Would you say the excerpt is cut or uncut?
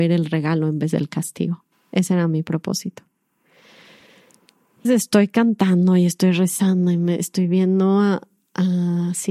cut